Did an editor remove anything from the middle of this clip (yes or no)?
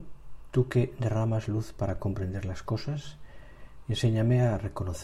no